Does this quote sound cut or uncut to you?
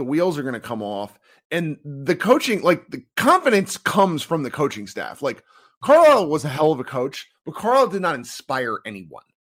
uncut